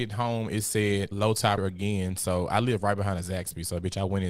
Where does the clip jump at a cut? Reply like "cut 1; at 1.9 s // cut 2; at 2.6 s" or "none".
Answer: cut 1; at 1.1 s // cut 2; at 1.6 s